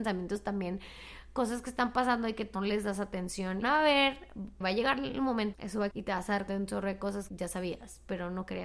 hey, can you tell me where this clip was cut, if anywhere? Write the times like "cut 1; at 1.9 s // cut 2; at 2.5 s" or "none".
cut 1; at 2.6 s // cut 2; at 3.6 s // cut 3; at 4.6 s // cut 4; at 5.5 s // cut 5; at 5.9 s // cut 6; at 6.5 s // cut 7; at 7.3 s